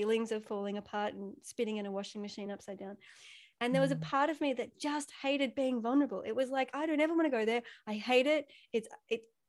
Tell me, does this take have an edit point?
no; 0 cuts

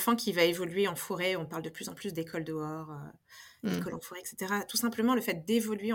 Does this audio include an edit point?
no; 0 cuts

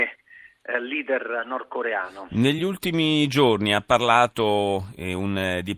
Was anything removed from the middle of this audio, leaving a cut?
no; 0 cuts

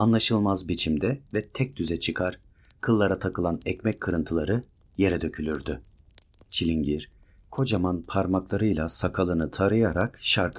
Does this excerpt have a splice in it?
no; 0 cuts

